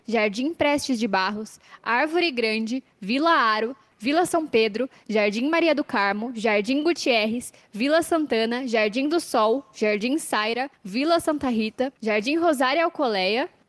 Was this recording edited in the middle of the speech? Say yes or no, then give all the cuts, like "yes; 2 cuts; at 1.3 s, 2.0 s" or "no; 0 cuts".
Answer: no; 0 cuts